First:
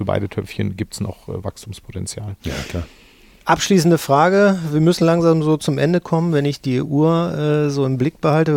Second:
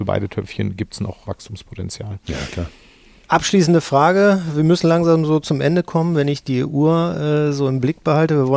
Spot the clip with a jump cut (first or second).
second